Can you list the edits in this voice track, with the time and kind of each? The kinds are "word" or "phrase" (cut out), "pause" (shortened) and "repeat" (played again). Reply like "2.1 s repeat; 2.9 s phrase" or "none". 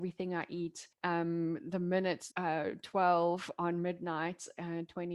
0.9 s pause; 2.3 s phrase